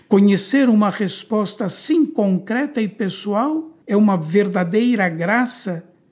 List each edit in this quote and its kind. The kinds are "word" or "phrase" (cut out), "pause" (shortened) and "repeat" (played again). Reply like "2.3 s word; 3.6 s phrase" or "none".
3.8 s pause